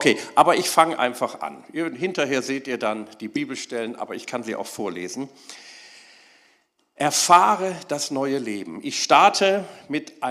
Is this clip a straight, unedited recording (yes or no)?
yes